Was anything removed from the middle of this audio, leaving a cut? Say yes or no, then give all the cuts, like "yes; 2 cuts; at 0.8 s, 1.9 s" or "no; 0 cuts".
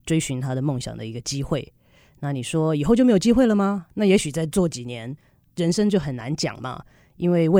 no; 0 cuts